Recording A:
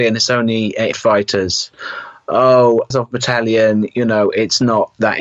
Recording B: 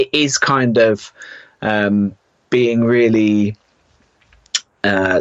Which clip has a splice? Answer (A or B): A